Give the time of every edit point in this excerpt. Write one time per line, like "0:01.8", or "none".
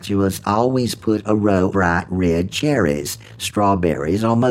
0:01.7